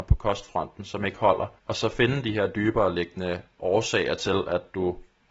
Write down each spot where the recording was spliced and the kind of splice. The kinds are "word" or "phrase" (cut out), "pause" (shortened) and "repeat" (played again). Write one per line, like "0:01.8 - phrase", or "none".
0:01.6 - pause